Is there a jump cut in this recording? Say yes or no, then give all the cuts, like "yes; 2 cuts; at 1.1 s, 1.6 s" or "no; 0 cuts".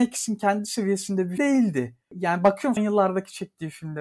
yes; 2 cuts; at 1.4 s, 2.8 s